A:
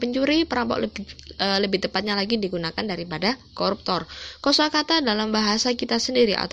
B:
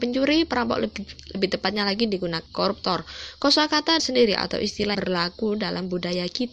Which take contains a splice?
B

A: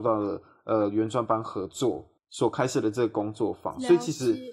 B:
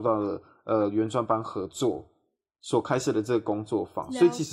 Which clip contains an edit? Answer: A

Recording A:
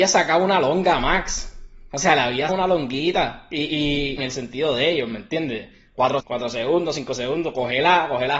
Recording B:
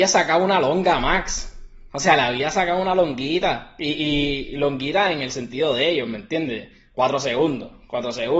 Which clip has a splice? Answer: A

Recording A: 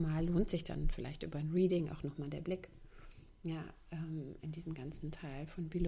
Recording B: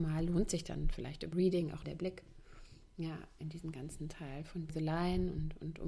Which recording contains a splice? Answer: B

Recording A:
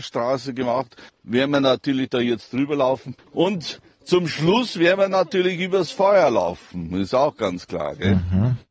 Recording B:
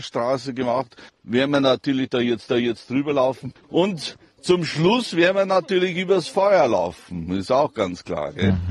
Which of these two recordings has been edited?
B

